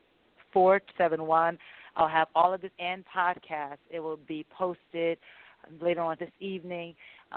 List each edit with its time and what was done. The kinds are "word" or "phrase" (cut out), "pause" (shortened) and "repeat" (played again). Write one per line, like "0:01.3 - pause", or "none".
0:00.9 - word
0:02.7 - word
0:03.0 - word
0:06.2 - word